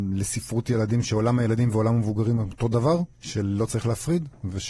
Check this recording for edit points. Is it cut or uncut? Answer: cut